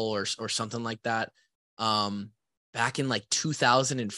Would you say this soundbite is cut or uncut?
uncut